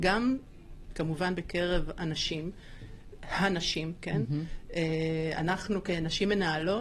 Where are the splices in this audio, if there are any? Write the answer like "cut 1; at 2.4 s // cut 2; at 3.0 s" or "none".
none